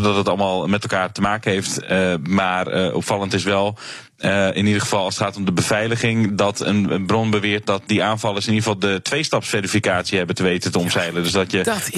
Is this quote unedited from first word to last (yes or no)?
yes